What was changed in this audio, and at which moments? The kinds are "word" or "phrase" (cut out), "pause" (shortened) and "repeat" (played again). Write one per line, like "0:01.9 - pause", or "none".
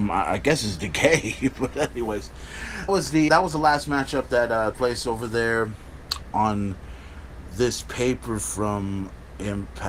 0:02.9 - word
0:03.3 - word
0:04.7 - word
0:08.4 - word